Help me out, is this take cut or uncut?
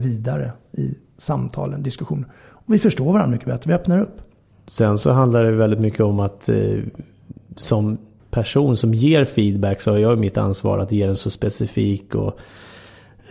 uncut